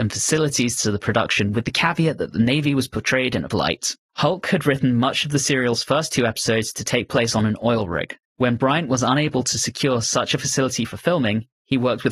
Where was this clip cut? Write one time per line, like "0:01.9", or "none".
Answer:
0:03.5